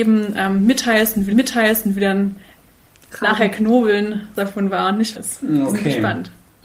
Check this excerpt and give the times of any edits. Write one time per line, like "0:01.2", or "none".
0:01.3
0:04.4
0:05.2